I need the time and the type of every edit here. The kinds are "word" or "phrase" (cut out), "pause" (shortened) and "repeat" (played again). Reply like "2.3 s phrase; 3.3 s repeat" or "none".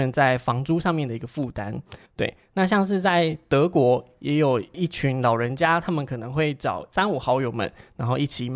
2.0 s pause